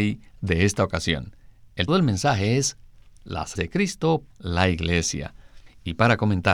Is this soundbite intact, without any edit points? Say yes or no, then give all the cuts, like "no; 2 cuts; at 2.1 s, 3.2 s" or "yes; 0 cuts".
no; 3 cuts; at 1.9 s, 3.6 s, 4.3 s